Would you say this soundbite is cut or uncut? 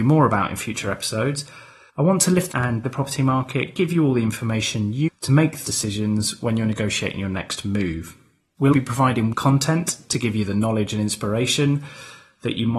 cut